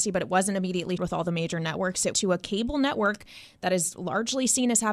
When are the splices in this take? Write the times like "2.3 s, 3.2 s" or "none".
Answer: 1.0 s, 2.1 s